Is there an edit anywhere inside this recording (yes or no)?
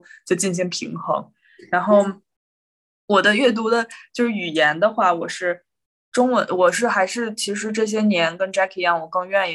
no